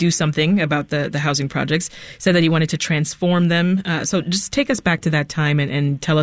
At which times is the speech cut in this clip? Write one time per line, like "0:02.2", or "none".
none